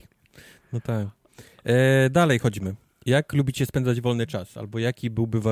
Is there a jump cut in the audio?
no; 0 cuts

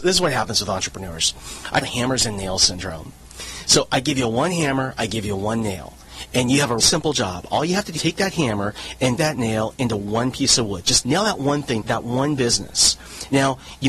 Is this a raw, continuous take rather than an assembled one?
no; 6 cuts; at 1.8 s, 6.8 s, 8.0 s, 9.2 s, 11.0 s, 11.8 s

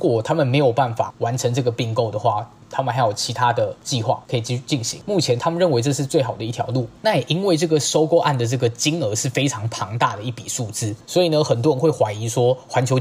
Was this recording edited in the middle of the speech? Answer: yes; 2 cuts; at 7.0 s, 11.0 s

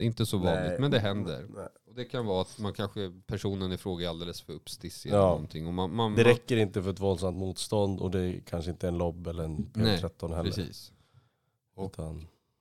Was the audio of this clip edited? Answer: no; 0 cuts

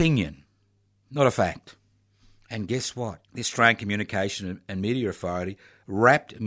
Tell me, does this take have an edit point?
yes; 1 cut; at 3.2 s

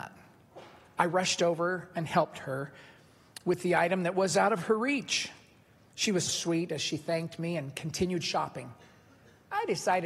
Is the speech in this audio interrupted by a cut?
yes; 1 cut; at 6.3 s

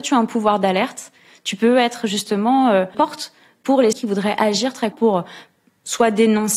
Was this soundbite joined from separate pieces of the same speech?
yes; 3 cuts; at 2.9 s, 3.9 s, 4.9 s

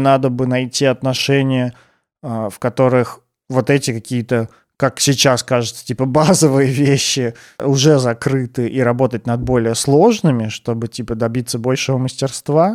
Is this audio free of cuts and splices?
yes; 0 cuts

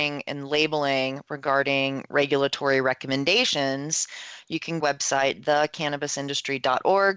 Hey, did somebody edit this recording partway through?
yes; 1 cut; at 4.8 s

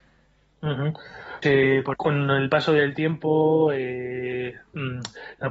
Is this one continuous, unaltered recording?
no; 2 cuts; at 1.4 s, 1.9 s

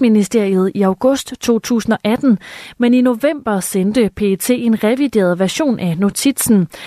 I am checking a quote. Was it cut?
no; 0 cuts

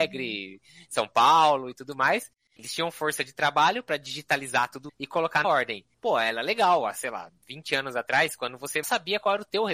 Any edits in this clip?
yes; 5 cuts; at 2.6 s, 4.9 s, 5.4 s, 5.9 s, 8.8 s

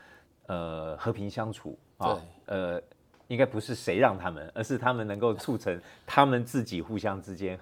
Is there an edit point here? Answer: no; 0 cuts

